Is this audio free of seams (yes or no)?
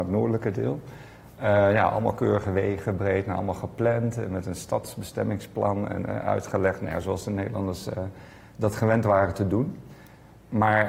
yes